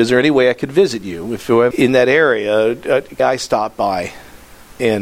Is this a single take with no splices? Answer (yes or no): no